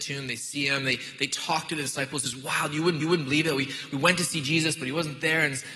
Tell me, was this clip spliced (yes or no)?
yes